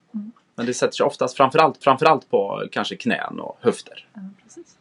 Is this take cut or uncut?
cut